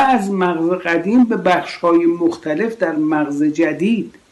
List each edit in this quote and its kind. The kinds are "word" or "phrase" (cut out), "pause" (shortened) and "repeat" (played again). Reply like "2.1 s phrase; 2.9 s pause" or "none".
none